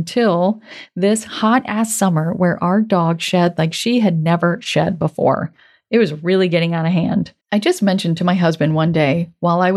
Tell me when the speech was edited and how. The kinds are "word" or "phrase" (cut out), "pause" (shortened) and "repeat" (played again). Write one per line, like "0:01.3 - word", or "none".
0:07.4 - pause